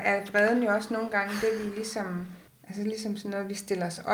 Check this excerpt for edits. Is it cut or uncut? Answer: cut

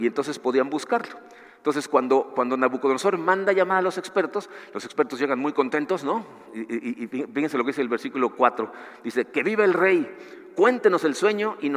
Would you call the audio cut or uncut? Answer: uncut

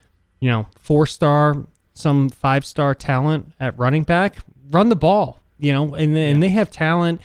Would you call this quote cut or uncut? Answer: uncut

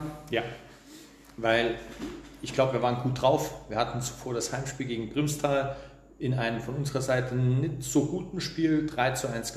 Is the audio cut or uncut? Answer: uncut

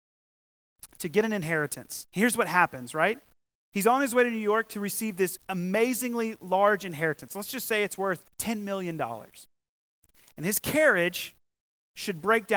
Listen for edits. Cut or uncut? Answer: cut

